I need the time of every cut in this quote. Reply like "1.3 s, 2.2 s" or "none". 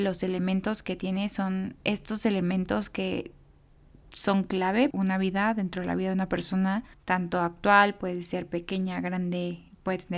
1.8 s, 4.9 s, 6.9 s